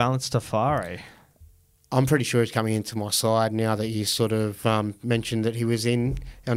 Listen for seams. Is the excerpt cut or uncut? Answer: uncut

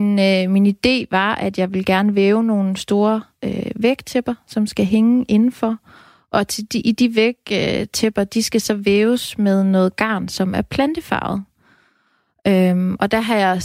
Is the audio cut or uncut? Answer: uncut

